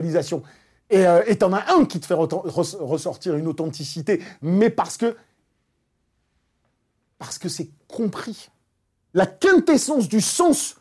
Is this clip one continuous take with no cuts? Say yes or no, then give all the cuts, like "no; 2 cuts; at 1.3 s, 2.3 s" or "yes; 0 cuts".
yes; 0 cuts